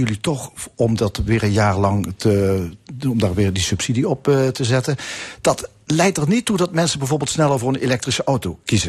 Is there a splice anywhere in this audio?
no; 0 cuts

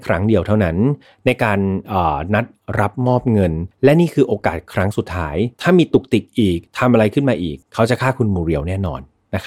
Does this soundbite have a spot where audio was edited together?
yes; 4 cuts; at 3.7 s, 5.5 s, 6.7 s, 7.6 s

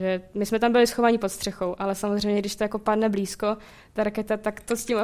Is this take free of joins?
yes; 0 cuts

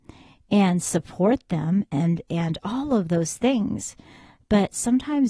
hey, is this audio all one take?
yes; 0 cuts

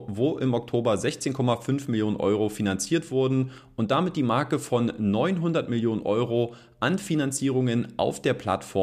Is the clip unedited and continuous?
yes; 0 cuts

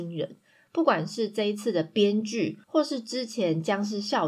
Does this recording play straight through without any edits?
no; 1 cut; at 2.6 s

